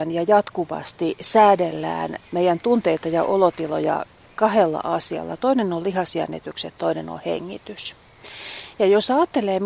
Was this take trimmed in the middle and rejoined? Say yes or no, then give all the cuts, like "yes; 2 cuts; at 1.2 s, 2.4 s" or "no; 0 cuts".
no; 0 cuts